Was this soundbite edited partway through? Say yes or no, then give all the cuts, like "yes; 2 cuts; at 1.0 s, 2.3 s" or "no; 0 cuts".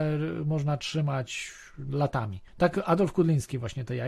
yes; 1 cut; at 2.5 s